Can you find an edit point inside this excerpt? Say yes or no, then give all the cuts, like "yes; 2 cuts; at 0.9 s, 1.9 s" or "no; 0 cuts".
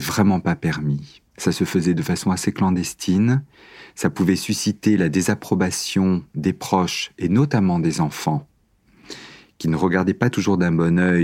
yes; 1 cut; at 1.3 s